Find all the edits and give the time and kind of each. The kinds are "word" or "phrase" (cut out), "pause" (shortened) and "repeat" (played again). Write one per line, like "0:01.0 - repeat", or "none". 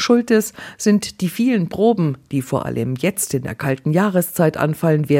none